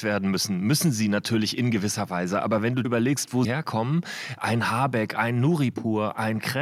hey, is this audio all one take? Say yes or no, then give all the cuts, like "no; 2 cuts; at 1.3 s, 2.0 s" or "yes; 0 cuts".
no; 2 cuts; at 2.8 s, 3.4 s